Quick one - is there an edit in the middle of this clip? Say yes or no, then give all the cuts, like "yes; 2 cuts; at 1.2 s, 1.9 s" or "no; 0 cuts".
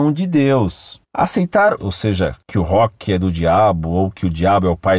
yes; 1 cut; at 1.8 s